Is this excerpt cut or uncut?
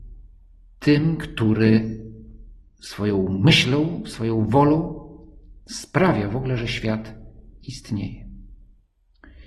uncut